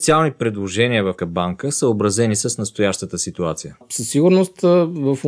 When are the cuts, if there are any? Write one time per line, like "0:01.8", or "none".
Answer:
0:01.2

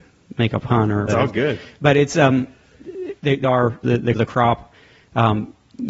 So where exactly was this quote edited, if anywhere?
0:01.1
0:03.4
0:03.8
0:04.1

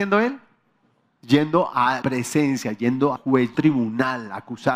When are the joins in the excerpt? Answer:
0:02.0
0:03.2
0:03.5

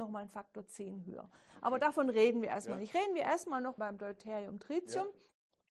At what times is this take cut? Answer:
0:03.8

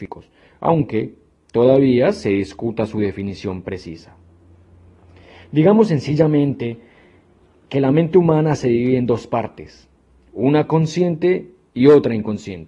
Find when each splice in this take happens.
none

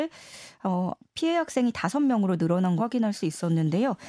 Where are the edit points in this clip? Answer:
0:02.8

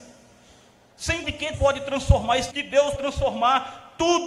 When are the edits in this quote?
0:01.2
0:01.5
0:02.5
0:03.0

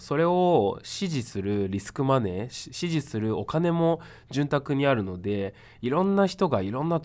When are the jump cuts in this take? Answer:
none

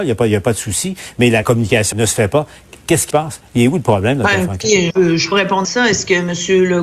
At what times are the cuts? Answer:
0:01.4
0:01.9
0:03.1
0:04.9
0:05.3
0:05.6

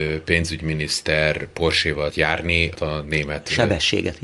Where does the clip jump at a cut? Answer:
0:02.1
0:02.8

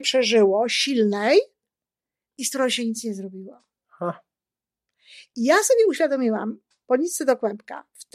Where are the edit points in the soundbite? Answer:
none

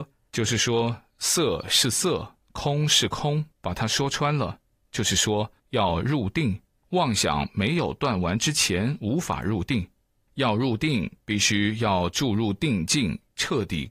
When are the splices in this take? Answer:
0:02.4
0:03.5
0:05.6

